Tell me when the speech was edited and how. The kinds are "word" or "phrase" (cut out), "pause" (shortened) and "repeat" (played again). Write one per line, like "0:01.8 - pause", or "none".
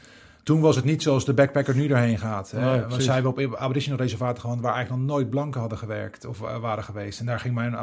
none